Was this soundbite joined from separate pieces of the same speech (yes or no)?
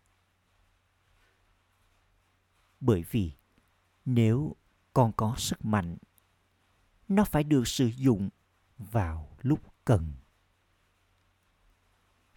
no